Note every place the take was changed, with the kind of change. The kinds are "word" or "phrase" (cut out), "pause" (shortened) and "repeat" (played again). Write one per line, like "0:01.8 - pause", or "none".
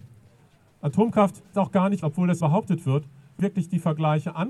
0:01.5 - word
0:02.0 - word
0:02.4 - word
0:03.4 - word